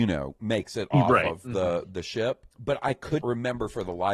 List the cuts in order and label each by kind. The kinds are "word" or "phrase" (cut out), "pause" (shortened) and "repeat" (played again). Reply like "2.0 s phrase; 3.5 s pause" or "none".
2.5 s pause; 3.2 s word